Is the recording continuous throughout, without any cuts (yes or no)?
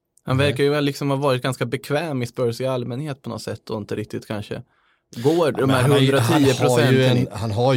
yes